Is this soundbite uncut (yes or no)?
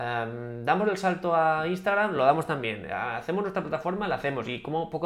yes